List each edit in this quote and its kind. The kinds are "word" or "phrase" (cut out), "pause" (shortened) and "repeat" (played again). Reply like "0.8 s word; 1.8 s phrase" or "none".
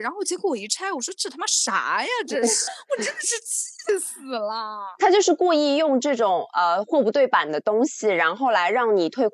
2.7 s word